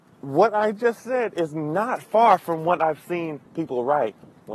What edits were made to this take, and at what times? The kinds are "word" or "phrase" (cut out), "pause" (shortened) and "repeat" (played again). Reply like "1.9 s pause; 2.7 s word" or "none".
3.5 s pause